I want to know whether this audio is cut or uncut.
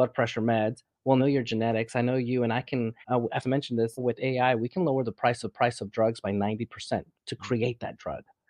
cut